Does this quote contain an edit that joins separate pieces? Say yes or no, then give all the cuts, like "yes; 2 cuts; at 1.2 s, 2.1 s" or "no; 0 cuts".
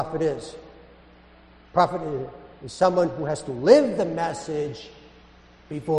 no; 0 cuts